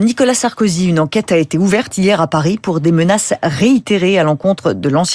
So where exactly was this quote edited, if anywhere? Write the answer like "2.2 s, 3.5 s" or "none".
none